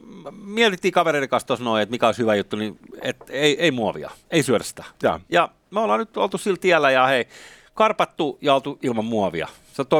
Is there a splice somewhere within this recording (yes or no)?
no